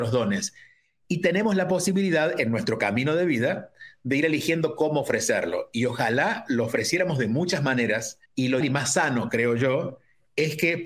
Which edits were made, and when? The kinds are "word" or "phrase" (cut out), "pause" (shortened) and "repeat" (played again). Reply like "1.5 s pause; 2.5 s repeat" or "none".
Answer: 8.3 s pause; 8.6 s word